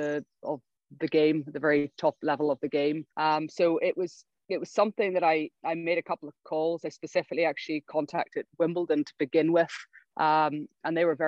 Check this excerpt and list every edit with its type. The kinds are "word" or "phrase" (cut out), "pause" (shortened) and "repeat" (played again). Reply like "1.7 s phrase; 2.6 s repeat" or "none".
3.1 s pause; 5.5 s pause; 10.0 s pause